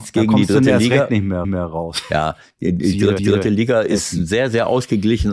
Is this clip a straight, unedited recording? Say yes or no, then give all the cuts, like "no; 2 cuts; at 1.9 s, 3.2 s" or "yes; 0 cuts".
no; 2 cuts; at 1.4 s, 3.2 s